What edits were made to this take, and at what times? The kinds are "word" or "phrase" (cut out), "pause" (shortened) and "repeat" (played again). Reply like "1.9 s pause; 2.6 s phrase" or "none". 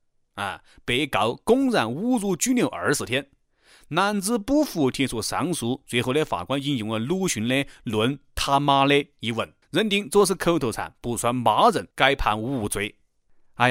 9.6 s pause; 11.9 s pause